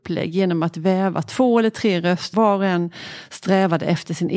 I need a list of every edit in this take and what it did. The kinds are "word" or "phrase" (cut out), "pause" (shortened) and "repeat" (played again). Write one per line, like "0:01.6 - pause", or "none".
0:02.3 - word